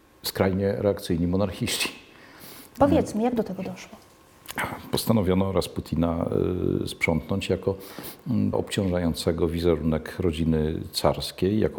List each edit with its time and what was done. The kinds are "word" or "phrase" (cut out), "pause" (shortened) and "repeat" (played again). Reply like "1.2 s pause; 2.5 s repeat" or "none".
8.5 s word